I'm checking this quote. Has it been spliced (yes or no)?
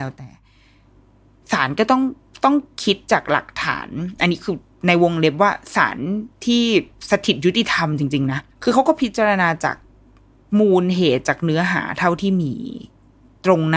yes